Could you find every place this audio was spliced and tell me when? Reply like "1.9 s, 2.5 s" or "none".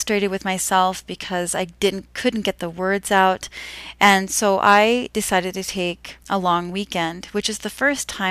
6.2 s